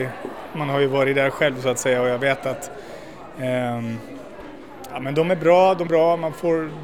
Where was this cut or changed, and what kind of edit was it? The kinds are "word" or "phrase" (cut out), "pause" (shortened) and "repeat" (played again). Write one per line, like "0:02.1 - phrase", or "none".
0:05.9 - word